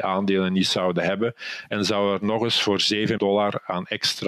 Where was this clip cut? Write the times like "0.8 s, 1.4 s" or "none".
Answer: 3.2 s